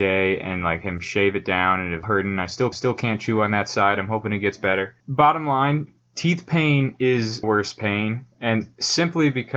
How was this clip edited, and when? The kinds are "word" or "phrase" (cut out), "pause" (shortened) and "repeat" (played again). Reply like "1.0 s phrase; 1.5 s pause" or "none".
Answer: 2.0 s word; 2.7 s repeat; 5.0 s pause; 7.4 s word; 8.3 s pause